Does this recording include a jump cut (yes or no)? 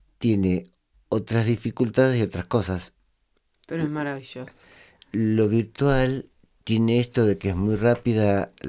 no